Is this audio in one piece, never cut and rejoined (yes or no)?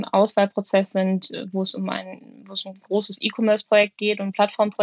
yes